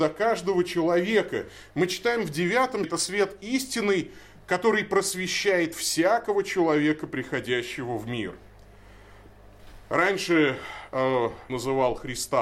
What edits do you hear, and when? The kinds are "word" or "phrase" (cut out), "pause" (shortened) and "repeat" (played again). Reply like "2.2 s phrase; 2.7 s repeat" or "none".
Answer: 2.8 s word; 11.5 s word